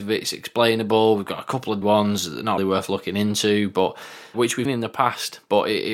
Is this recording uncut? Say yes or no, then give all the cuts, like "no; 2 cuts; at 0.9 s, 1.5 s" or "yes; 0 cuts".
no; 4 cuts; at 1.8 s, 2.6 s, 4.3 s, 4.6 s